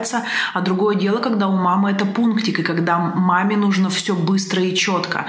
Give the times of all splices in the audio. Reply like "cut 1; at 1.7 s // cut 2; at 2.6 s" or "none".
none